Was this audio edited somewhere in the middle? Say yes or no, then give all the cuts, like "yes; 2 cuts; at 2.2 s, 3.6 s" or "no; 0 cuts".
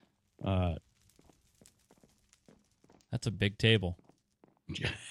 no; 0 cuts